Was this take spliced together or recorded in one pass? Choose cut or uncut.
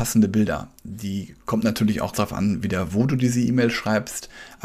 cut